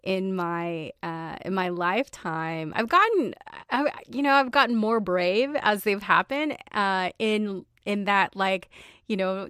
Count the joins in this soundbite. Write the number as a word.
zero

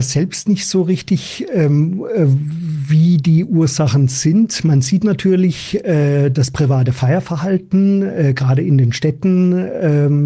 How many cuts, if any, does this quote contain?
zero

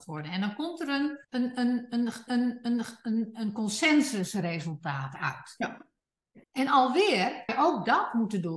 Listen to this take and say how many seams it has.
four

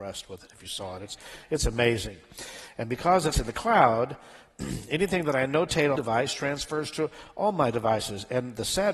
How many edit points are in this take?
two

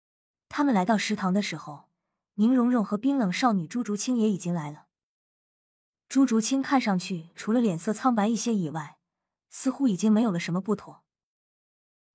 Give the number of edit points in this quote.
zero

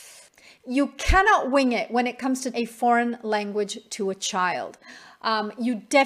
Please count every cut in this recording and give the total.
one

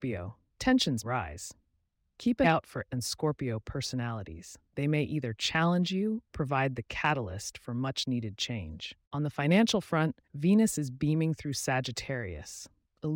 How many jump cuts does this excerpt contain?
six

